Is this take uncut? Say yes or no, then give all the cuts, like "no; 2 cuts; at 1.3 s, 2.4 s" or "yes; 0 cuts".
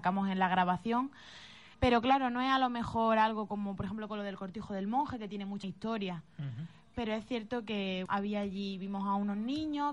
no; 3 cuts; at 1.7 s, 5.6 s, 8.1 s